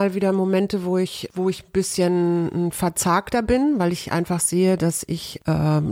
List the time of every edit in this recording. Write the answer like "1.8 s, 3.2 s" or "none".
none